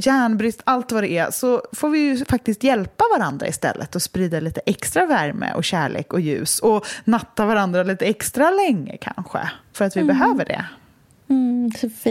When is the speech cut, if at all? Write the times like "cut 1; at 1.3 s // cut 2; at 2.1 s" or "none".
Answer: none